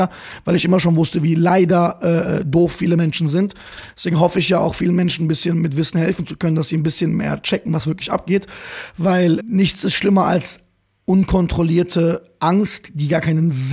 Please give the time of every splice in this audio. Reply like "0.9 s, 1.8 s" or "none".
9.4 s

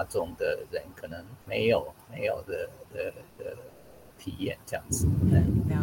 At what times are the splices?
1.4 s, 3.3 s

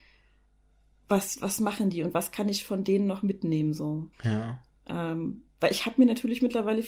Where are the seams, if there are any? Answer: 4.1 s

